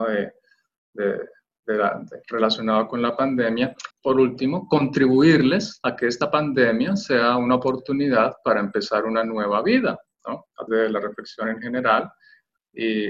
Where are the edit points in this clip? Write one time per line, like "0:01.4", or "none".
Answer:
0:03.9
0:10.7